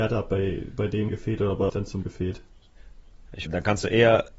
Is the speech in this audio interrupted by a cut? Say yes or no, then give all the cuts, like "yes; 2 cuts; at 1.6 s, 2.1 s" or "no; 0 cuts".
yes; 4 cuts; at 1.1 s, 1.7 s, 2.0 s, 3.5 s